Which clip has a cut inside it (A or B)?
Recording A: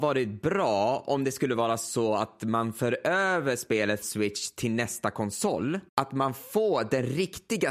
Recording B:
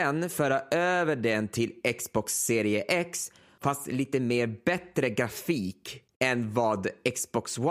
A